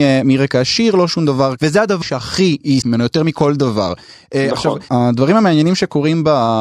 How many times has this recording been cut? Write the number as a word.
four